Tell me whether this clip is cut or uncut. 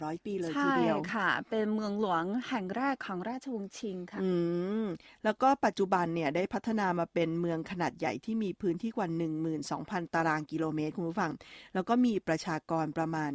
uncut